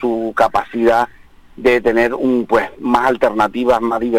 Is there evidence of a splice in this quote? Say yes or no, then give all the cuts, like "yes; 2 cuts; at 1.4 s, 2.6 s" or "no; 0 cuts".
no; 0 cuts